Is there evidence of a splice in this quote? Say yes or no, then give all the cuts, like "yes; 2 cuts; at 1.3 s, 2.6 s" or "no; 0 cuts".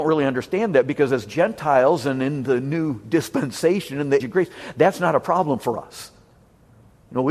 yes; 1 cut; at 4.2 s